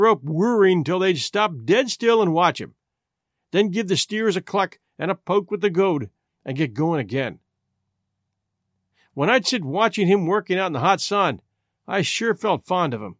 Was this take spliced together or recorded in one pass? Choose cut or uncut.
uncut